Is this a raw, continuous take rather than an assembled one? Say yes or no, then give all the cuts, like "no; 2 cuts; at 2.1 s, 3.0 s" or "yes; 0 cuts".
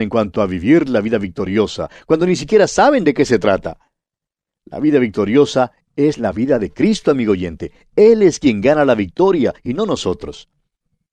yes; 0 cuts